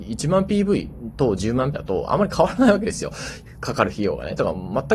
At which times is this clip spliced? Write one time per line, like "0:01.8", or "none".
0:01.7